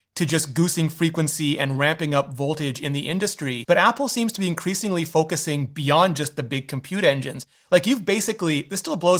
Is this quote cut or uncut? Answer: uncut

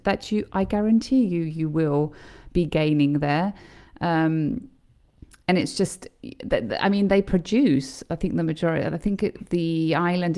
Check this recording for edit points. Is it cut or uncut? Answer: uncut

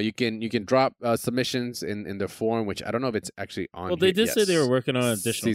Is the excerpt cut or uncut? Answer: uncut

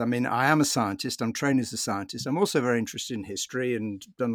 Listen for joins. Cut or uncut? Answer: uncut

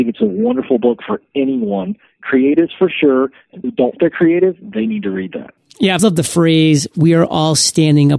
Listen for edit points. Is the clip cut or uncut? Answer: cut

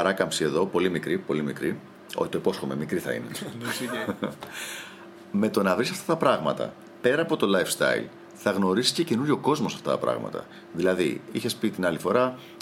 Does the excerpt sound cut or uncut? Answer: uncut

